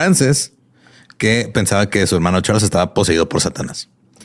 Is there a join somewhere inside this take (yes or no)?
no